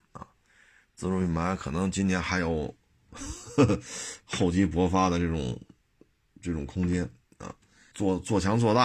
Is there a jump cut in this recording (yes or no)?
yes